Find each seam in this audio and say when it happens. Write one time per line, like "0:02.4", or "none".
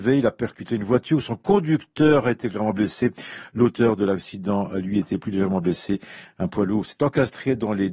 none